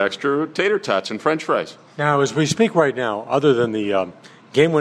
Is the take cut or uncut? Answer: uncut